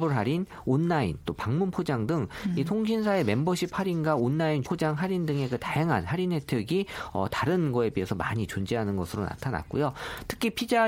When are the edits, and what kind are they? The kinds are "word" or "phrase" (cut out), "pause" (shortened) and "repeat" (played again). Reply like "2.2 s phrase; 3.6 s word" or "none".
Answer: 4.6 s phrase